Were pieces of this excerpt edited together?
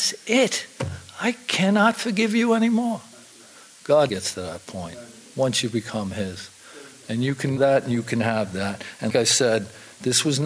yes; 3 cuts; at 4.1 s, 7.6 s, 9.1 s

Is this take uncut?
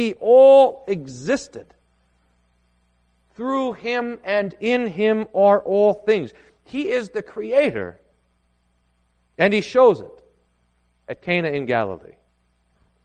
yes; 0 cuts

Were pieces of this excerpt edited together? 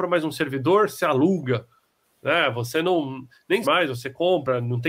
yes; 1 cut; at 3.6 s

